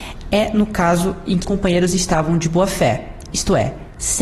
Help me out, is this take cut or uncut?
cut